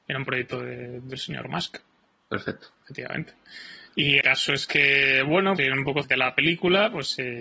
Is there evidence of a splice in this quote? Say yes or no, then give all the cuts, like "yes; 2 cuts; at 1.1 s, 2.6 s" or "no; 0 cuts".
yes; 4 cuts; at 2.7 s, 4.2 s, 5.6 s, 6.0 s